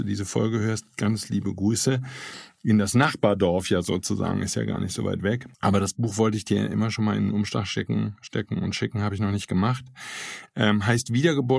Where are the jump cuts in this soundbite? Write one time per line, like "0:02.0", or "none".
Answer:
0:05.5